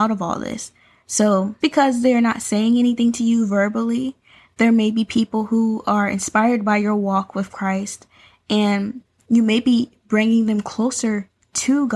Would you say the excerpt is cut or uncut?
cut